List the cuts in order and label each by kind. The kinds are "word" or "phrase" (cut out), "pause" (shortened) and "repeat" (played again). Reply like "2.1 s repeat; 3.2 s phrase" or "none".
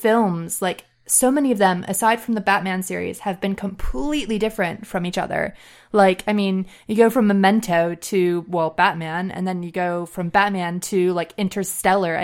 none